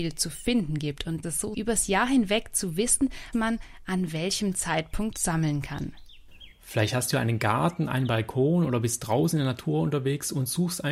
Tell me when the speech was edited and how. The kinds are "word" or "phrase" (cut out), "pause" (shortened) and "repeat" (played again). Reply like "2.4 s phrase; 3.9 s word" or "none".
1.2 s phrase; 1.5 s word; 3.3 s word

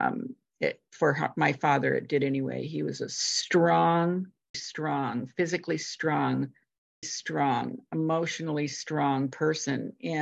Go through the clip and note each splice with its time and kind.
4.5 s word; 7.0 s word

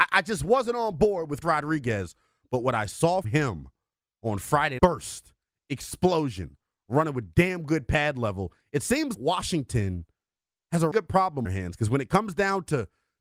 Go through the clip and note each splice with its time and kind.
1.4 s word; 3.2 s word; 4.8 s word; 9.1 s word; 10.9 s word; 11.4 s phrase

